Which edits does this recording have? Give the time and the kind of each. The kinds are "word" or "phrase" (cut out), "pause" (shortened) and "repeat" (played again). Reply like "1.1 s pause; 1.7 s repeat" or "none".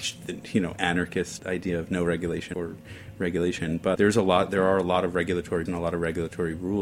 1.4 s word; 2.5 s word; 4.0 s word; 5.7 s word